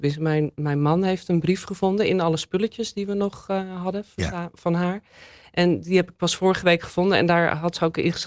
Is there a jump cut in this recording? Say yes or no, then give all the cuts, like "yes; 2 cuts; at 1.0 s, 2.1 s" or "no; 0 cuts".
no; 0 cuts